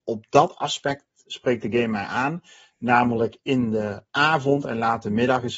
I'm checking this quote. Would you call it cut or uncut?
uncut